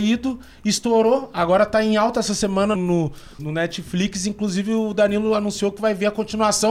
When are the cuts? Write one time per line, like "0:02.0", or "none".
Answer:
0:02.8
0:03.4